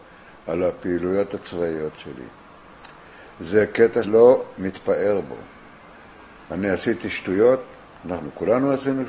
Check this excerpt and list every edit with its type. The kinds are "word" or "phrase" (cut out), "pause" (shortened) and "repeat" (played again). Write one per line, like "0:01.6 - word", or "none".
0:04.0 - word